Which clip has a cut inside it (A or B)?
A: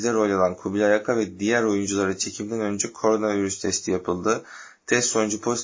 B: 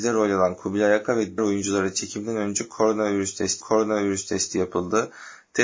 B